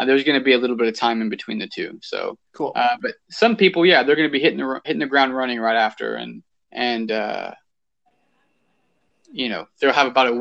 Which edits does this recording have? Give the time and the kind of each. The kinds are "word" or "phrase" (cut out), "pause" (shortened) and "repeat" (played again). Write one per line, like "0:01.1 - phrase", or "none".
0:02.4 - pause
0:04.8 - word
0:06.5 - pause